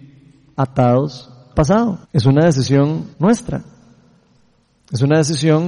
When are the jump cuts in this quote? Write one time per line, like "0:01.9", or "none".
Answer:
0:01.5
0:02.0
0:03.1